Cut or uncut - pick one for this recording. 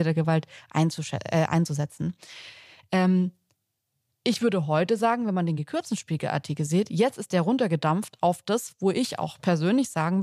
uncut